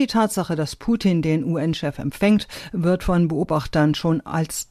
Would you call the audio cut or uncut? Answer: uncut